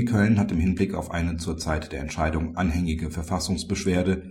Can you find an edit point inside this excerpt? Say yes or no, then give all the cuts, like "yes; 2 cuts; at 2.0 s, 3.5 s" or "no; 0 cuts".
no; 0 cuts